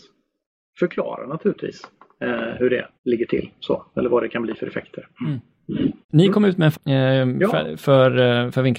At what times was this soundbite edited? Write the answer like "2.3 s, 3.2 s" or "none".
3.0 s, 4.1 s, 5.2 s, 6.0 s, 6.7 s